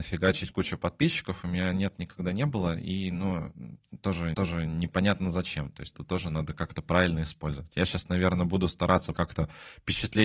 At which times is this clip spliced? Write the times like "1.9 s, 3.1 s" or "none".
4.3 s, 5.9 s, 9.1 s